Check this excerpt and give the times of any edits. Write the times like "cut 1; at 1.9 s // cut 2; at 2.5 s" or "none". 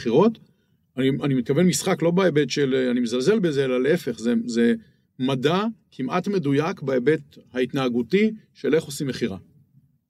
none

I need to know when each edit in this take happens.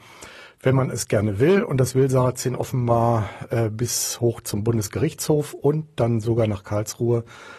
none

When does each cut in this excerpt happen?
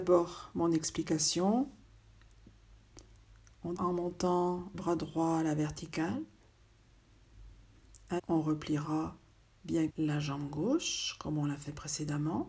cut 1; at 3.8 s // cut 2; at 4.7 s // cut 3; at 8.2 s // cut 4; at 9.9 s

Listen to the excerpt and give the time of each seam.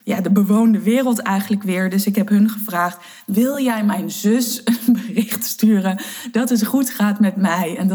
none

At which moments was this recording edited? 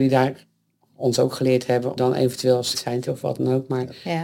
cut 1; at 2.0 s // cut 2; at 2.7 s // cut 3; at 3.1 s

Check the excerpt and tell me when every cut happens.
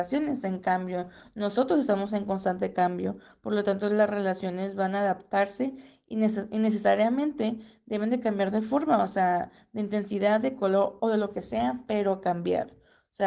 cut 1; at 11.0 s

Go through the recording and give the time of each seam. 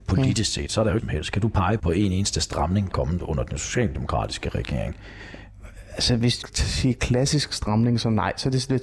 cut 1; at 1.0 s // cut 2; at 1.8 s // cut 3; at 2.9 s // cut 4; at 6.4 s

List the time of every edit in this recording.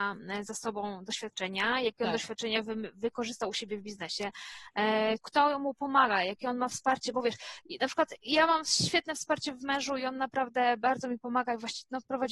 cut 1; at 5.2 s

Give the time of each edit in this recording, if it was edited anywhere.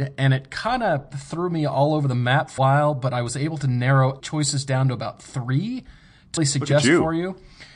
cut 1; at 2.6 s // cut 2; at 4.2 s // cut 3; at 6.4 s

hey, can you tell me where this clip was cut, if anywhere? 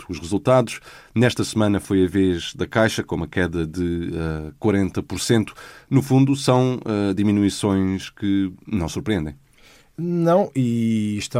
none

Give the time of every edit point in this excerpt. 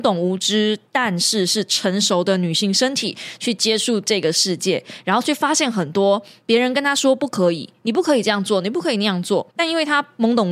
cut 1; at 9.5 s

